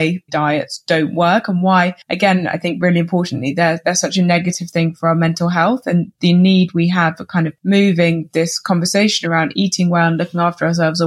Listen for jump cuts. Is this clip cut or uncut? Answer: cut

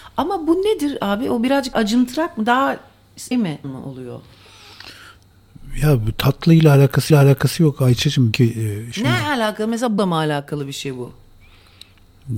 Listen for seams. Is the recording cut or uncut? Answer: cut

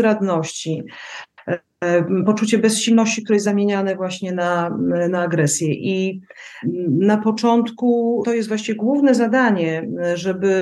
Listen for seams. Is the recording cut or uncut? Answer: uncut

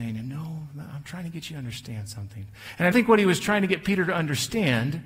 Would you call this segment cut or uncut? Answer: cut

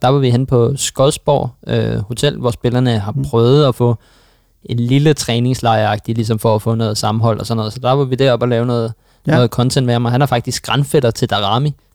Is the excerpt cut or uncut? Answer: uncut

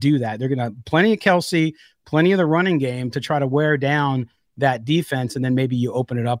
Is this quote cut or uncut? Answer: uncut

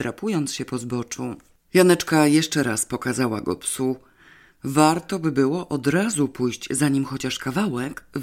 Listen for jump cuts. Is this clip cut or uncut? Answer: uncut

